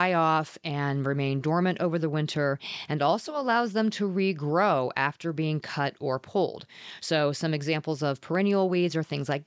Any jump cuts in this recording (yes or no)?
no